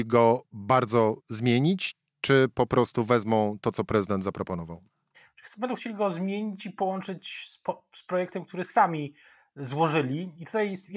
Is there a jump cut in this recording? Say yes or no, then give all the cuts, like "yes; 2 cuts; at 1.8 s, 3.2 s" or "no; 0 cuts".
yes; 1 cut; at 1.2 s